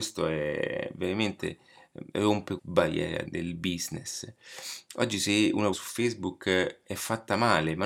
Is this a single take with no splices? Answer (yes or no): no